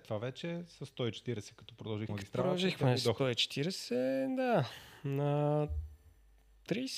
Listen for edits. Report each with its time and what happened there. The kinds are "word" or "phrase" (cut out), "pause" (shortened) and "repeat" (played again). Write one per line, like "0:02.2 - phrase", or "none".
0:02.1 - word